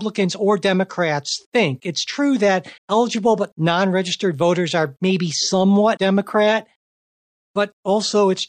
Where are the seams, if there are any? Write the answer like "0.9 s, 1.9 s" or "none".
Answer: 2.8 s, 6.0 s